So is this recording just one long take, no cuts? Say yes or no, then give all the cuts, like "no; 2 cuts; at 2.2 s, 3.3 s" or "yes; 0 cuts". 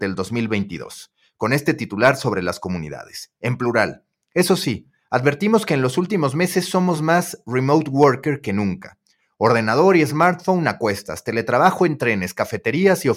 yes; 0 cuts